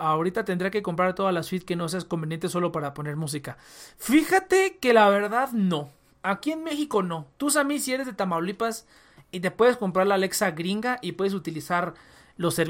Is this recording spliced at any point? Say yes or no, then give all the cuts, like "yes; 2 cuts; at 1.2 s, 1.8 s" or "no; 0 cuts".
no; 0 cuts